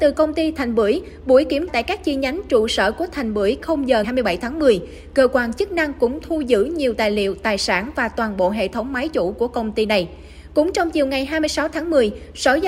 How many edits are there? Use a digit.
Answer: 3